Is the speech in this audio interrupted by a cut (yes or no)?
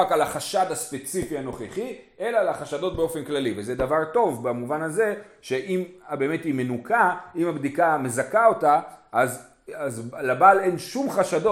no